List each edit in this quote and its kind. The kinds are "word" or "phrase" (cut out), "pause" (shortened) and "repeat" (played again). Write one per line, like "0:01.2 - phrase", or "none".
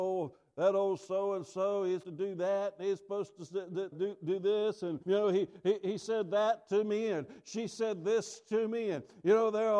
0:02.0 - word
0:03.9 - word
0:05.0 - pause